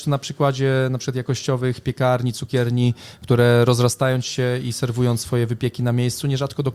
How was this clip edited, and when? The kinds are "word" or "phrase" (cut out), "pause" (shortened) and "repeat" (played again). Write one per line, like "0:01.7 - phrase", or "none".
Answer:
none